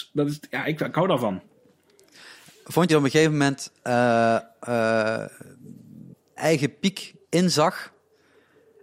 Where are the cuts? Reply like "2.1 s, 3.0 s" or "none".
2.9 s, 6.4 s, 7.2 s